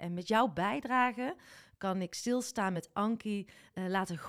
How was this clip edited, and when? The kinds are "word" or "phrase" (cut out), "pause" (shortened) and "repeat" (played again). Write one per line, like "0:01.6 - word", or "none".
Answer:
none